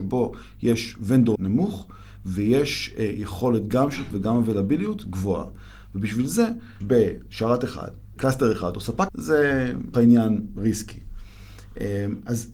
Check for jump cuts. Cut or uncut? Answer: cut